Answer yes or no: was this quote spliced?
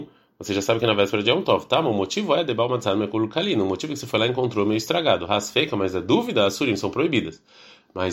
no